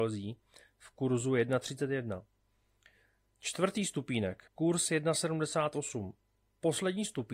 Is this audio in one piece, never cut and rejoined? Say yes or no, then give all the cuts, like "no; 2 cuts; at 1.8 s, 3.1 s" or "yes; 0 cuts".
no; 1 cut; at 4.5 s